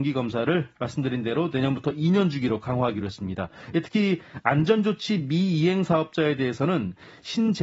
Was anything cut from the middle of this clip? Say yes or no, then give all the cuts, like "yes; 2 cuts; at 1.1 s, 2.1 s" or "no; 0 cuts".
no; 0 cuts